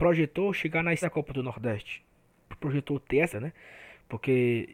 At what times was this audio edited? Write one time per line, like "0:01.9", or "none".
0:01.0
0:03.3